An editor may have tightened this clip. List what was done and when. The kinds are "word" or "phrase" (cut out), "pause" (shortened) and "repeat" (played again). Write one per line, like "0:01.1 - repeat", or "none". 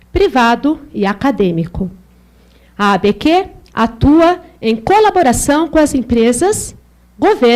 none

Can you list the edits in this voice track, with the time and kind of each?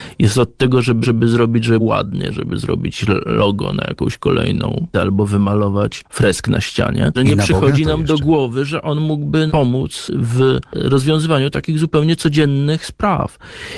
0:01.0 - repeat
0:01.8 - word
0:04.9 - word
0:07.2 - word
0:09.5 - word

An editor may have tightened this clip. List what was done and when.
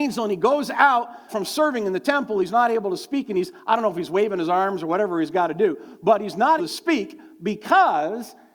0:01.3 - word
0:06.6 - word

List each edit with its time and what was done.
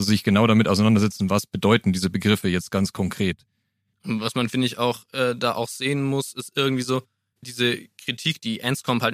none

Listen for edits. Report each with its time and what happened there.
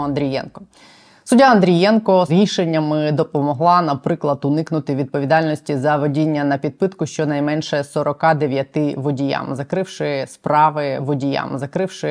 0:02.3 - word
0:11.0 - repeat

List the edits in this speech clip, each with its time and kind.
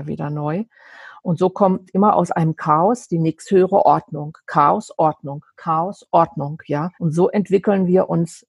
0:06.9 - pause

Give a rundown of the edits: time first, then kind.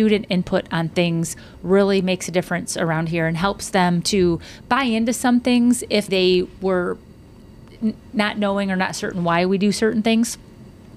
0:06.1 - word

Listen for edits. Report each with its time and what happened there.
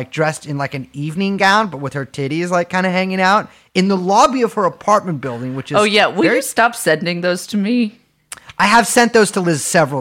none

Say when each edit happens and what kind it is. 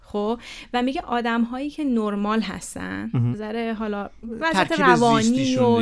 0:03.3 - word

